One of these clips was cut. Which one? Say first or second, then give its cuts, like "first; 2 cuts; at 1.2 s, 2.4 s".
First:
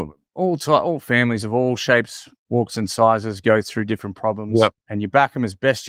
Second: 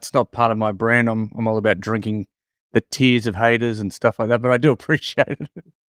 first; 1 cut; at 4.8 s